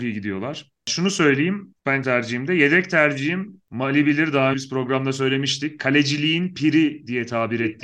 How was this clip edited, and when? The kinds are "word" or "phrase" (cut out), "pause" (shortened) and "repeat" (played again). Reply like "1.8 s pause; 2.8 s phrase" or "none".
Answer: 2.0 s word; 4.5 s word